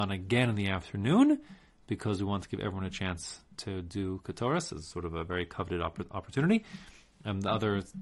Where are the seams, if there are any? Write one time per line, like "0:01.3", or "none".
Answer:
none